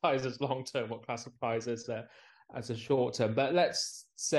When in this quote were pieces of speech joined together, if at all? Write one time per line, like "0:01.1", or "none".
none